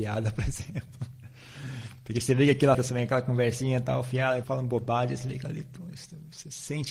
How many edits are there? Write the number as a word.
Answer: two